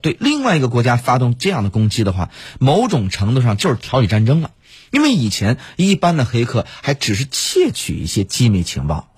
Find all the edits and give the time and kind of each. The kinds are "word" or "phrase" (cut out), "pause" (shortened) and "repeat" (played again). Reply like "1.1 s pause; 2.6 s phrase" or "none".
none